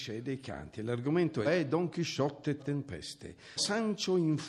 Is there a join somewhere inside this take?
yes; 3 cuts; at 1.4 s, 2.6 s, 3.6 s

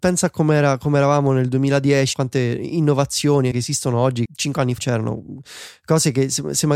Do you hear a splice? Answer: yes; 4 cuts; at 2.1 s, 3.5 s, 4.3 s, 4.8 s

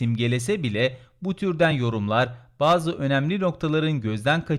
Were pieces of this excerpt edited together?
no; 0 cuts

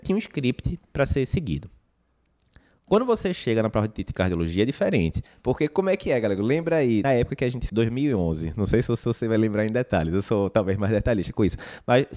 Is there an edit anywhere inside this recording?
yes; 4 cuts; at 5.3 s, 7.0 s, 7.7 s, 9.0 s

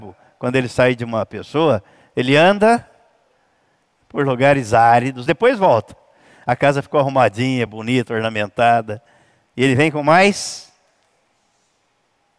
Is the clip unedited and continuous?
yes; 0 cuts

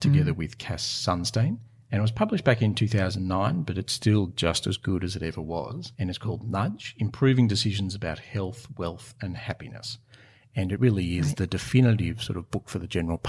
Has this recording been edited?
no; 0 cuts

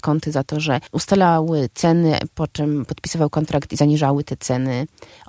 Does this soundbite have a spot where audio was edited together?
no; 0 cuts

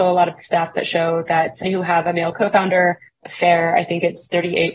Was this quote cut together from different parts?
yes; 2 cuts; at 1.6 s, 3.2 s

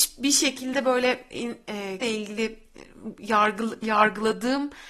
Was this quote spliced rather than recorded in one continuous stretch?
yes; 2 cuts; at 2.0 s, 3.8 s

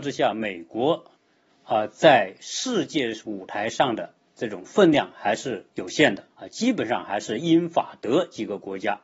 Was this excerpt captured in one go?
no; 2 cuts; at 5.7 s, 6.3 s

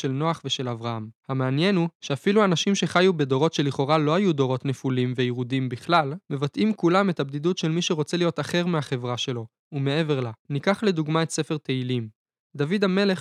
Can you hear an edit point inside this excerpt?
yes; 5 cuts; at 1.2 s, 2.0 s, 6.2 s, 10.4 s, 12.3 s

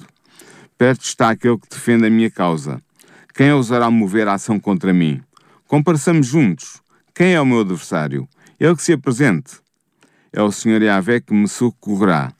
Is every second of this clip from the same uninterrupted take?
yes; 0 cuts

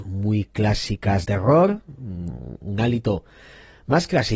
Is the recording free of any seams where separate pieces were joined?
no; 1 cut; at 1.2 s

